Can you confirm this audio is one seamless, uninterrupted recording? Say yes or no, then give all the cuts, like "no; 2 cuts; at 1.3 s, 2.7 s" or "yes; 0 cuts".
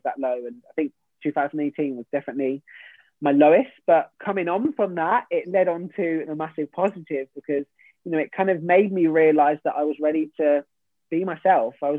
yes; 0 cuts